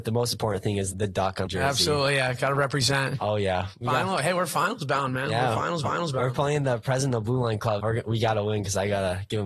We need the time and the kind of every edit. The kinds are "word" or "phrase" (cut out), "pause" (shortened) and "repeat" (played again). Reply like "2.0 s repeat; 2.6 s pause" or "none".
0.9 s word; 1.5 s phrase; 5.8 s repeat; 7.8 s word

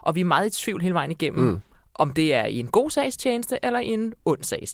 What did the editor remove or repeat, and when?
none

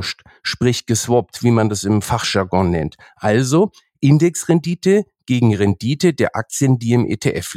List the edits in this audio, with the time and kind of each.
none

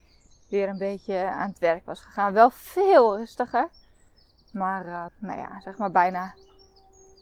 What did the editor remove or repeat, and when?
5.1 s word

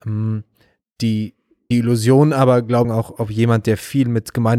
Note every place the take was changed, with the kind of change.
1.7 s word; 2.8 s phrase

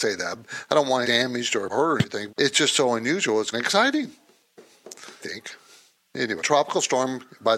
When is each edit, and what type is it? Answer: 1.0 s word; 1.7 s word; 2.3 s word; 3.5 s word; 5.2 s word; 6.4 s word

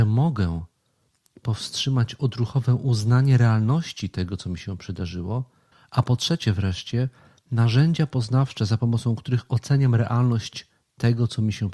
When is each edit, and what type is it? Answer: 5.7 s pause

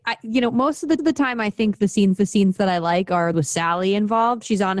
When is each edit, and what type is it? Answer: 1.0 s repeat; 2.2 s repeat; 3.3 s phrase

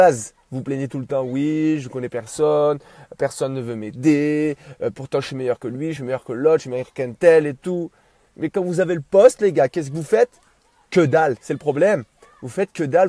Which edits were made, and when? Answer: none

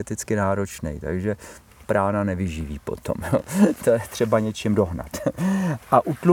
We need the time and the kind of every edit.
1.8 s phrase

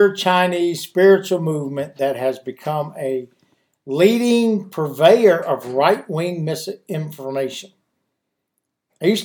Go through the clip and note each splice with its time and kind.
none

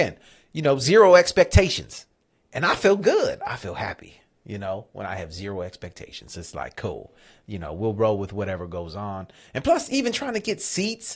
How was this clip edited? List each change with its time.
none

